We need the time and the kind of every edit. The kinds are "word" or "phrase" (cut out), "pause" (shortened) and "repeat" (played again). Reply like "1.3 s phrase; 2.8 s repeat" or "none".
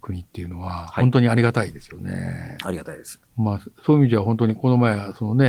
3.3 s pause